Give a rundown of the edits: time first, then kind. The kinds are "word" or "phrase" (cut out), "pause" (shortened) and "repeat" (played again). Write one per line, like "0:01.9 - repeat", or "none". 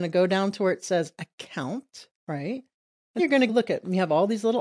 0:02.2 - pause
0:03.2 - word
0:03.5 - word